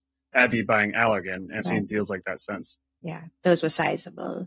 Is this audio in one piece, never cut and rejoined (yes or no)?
no